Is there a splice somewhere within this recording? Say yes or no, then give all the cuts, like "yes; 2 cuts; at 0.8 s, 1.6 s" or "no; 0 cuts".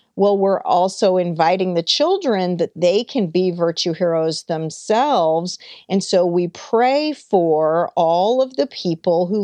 no; 0 cuts